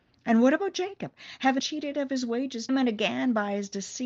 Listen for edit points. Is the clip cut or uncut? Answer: cut